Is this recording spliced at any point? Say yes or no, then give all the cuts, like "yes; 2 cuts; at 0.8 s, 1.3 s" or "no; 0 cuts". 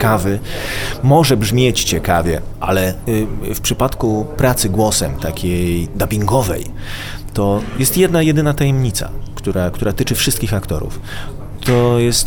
no; 0 cuts